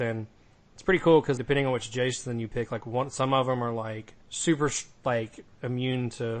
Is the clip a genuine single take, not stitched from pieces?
no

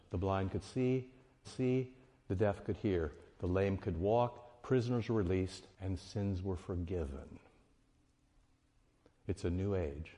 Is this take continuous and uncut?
no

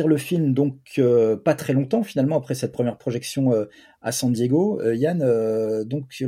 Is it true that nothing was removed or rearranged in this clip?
yes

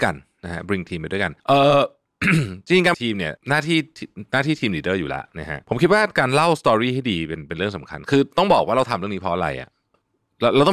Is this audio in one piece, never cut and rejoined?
no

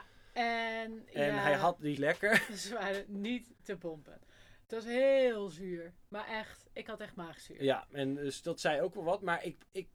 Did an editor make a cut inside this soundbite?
yes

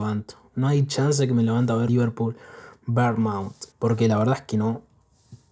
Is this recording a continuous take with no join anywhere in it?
no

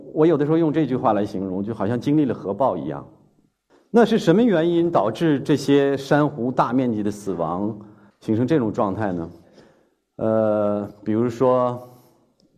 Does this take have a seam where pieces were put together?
no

